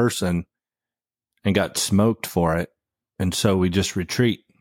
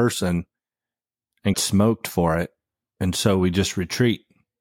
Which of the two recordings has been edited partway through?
second; 1 cut; at 1.5 s

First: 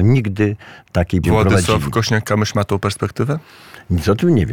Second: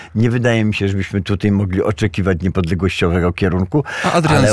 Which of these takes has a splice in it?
first; 1 cut; at 1.2 s

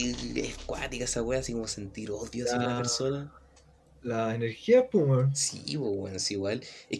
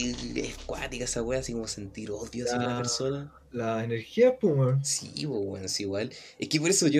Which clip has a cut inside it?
second; 1 cut; at 3.4 s

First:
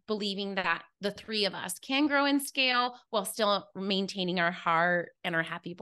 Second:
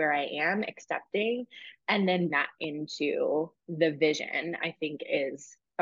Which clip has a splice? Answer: second; 2 cuts; at 2.3 s, 3.6 s

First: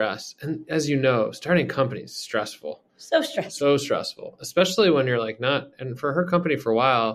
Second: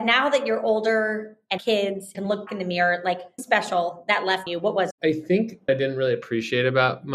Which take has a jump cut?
second; 7 cuts; at 1.6 s, 2.1 s, 2.5 s, 3.4 s, 4.5 s, 4.9 s, 5.7 s

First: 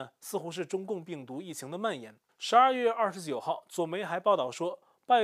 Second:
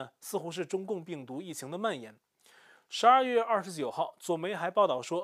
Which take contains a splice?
first; 1 cut; at 2.3 s

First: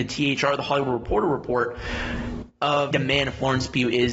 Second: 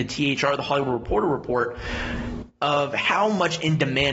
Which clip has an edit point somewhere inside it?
first; 1 cut; at 2.9 s

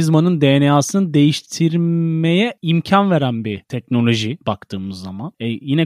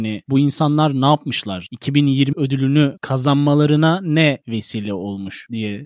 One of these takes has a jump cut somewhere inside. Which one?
second; 1 cut; at 2.3 s

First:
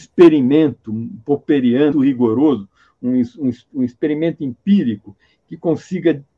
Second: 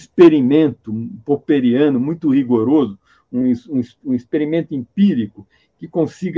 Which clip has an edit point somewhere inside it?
first; 1 cut; at 1.9 s

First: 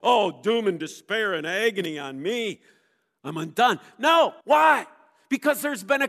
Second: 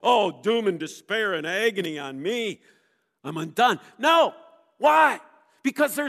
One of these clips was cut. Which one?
first; 1 cut; at 4.4 s

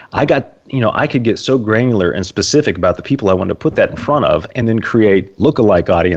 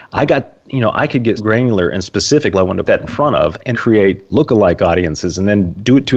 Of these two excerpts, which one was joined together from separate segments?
second; 4 cuts; at 1.4 s, 2.5 s, 2.8 s, 3.7 s

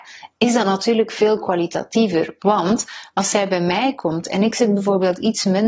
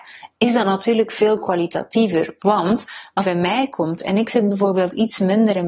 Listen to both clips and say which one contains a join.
second; 1 cut; at 3.2 s

